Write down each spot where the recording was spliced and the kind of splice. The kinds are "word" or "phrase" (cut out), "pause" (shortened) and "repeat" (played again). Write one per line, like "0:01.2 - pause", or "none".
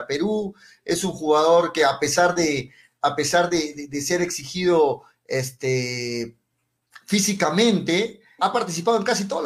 0:08.4 - word